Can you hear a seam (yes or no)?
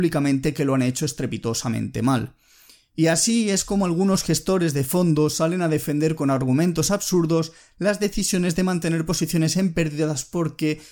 no